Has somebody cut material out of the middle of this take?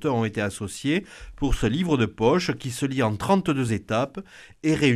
no; 0 cuts

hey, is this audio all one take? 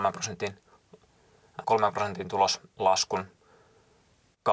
no; 1 cut; at 1.6 s

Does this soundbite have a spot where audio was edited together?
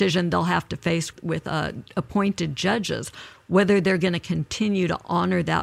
yes; 1 cut; at 1.1 s

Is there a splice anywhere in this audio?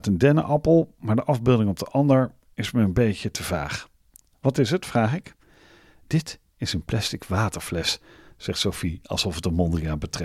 no; 0 cuts

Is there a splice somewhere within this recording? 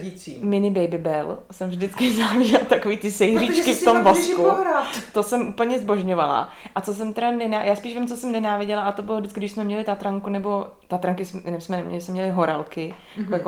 no; 0 cuts

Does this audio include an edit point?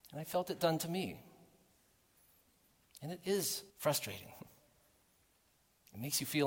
yes; 1 cut; at 3.7 s

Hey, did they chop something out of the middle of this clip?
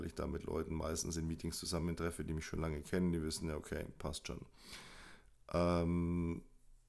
no; 0 cuts

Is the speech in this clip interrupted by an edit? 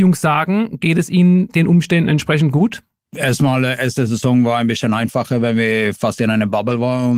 no; 0 cuts

